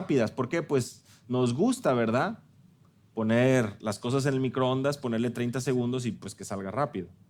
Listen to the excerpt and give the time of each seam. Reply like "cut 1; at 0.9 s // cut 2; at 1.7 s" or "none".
none